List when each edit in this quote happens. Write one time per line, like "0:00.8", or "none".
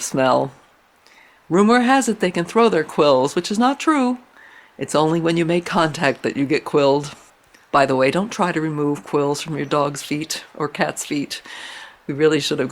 none

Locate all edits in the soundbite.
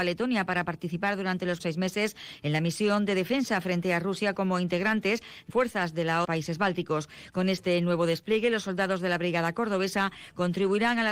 0:01.6
0:05.5
0:06.2

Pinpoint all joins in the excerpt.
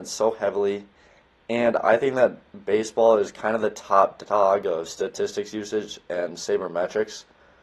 none

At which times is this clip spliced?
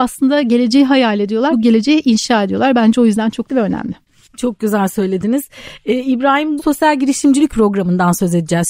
0:01.5
0:03.5
0:06.6
0:07.5

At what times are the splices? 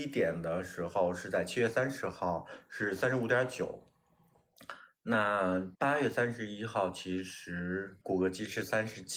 0:05.7
0:08.0

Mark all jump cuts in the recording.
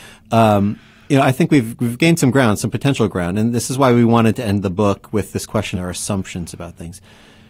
0:05.7

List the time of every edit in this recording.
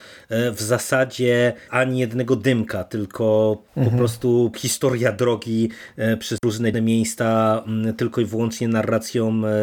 0:01.7
0:04.5
0:06.7

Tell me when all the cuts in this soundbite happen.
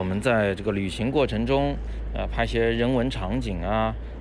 none

